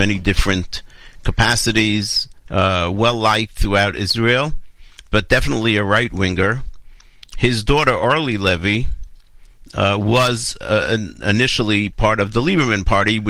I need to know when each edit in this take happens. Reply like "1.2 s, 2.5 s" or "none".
2.4 s

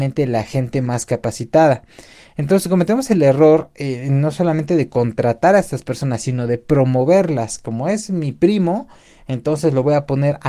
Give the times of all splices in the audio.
none

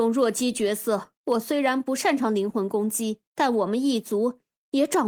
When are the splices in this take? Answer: 1.1 s, 3.2 s

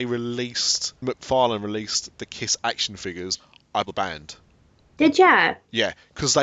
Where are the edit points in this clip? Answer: 1.0 s, 3.8 s

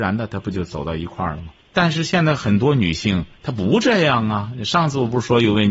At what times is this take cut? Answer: 1.6 s, 3.4 s

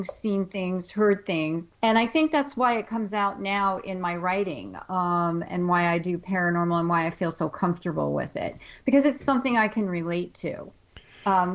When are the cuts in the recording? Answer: 1.7 s

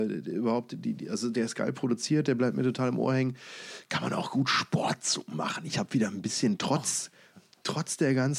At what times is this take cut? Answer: none

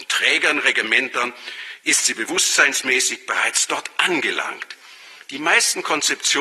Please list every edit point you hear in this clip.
none

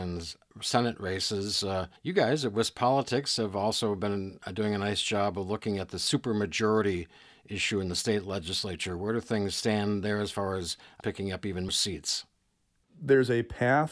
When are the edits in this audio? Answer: 2.0 s, 11.0 s, 11.7 s

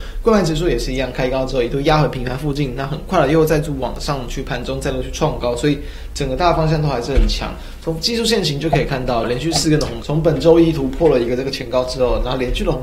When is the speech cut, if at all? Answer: 9.2 s, 10.0 s

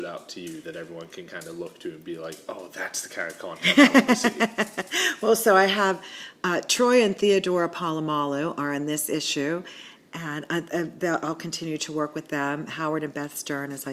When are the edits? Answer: none

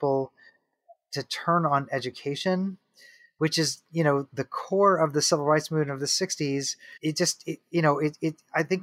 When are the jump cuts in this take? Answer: 7.0 s

